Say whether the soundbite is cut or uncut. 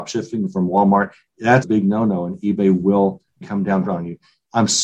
cut